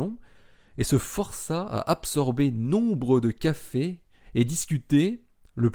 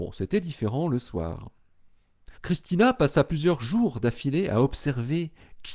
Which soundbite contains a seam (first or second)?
second